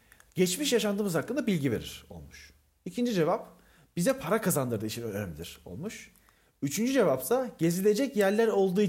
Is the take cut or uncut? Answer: uncut